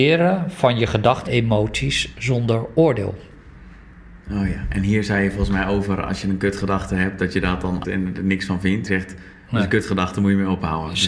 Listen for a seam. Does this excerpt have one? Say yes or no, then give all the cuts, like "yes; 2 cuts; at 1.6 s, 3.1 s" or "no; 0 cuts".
yes; 3 cuts; at 1.3 s, 7.8 s, 8.9 s